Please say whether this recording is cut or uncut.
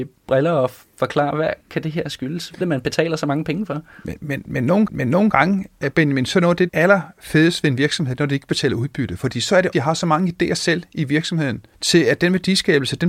cut